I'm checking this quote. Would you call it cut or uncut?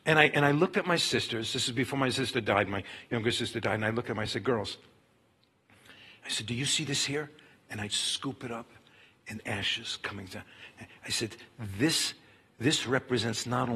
uncut